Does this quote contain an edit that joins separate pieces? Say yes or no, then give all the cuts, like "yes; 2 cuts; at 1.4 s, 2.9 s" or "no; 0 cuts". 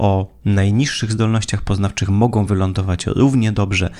no; 0 cuts